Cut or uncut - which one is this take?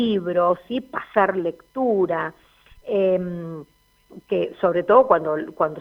uncut